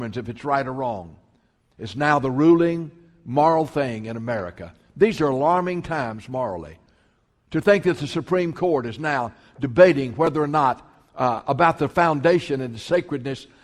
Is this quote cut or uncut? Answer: uncut